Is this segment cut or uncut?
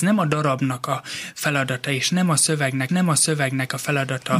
cut